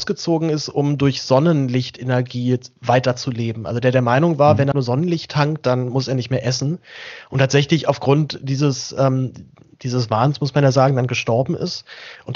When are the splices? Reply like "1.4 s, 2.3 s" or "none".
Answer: 4.7 s